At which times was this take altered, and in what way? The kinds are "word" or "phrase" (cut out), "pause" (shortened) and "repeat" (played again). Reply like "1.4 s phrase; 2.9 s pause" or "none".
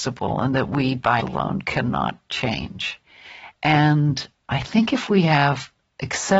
1.2 s word